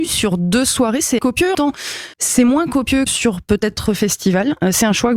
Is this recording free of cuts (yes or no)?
no